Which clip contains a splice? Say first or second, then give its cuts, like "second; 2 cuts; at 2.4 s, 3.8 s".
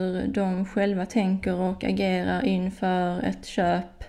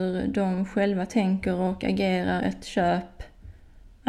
second; 1 cut; at 2.4 s